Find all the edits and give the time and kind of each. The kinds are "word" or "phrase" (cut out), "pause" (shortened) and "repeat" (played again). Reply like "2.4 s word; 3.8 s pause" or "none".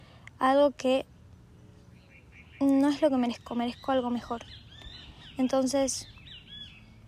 none